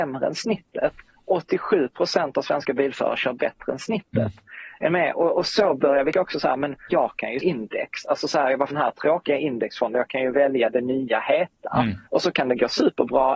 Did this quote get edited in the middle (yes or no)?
yes